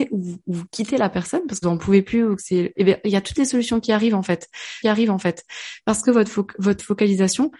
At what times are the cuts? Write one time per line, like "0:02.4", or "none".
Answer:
0:01.6
0:04.8